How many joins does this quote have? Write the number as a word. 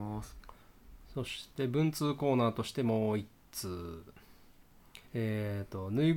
one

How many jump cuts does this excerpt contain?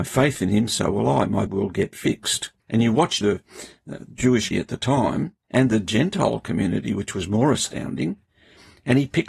five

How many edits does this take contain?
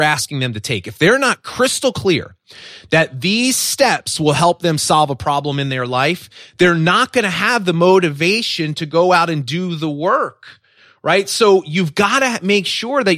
zero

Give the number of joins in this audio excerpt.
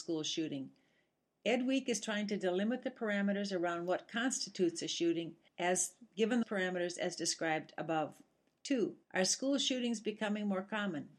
three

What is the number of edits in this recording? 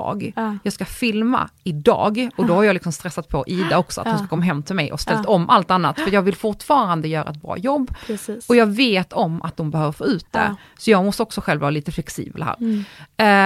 zero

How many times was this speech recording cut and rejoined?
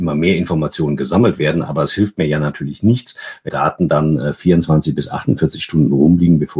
one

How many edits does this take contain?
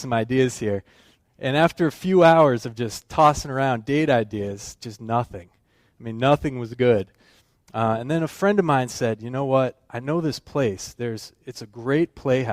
zero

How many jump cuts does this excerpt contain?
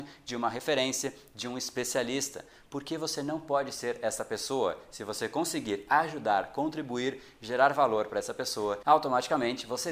zero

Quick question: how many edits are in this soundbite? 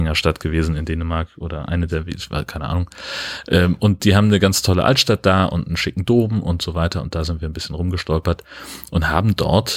zero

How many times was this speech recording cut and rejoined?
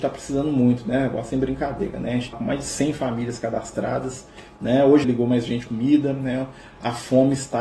three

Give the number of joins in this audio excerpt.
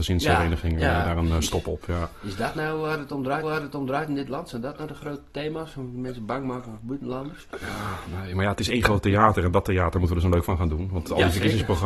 two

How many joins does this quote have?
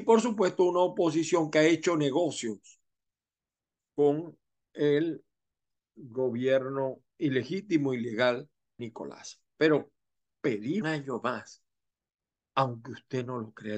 two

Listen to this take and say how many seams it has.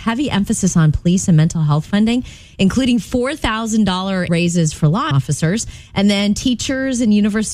two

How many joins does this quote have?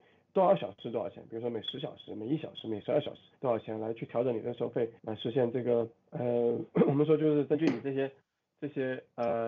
three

